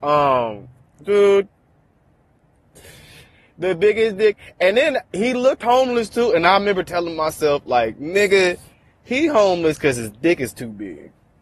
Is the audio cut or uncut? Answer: uncut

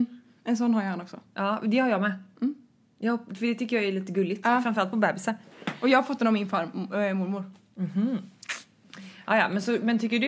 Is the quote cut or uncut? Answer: uncut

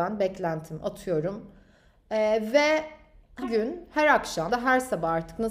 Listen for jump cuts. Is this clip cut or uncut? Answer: cut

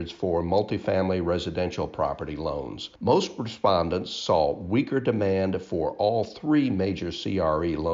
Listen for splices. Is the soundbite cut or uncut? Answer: cut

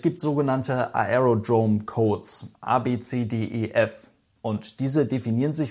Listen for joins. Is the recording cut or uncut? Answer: uncut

